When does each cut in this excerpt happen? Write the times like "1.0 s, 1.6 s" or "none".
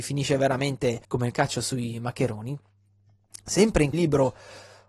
1.0 s, 3.9 s